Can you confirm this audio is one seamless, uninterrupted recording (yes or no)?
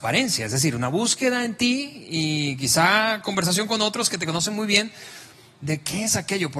yes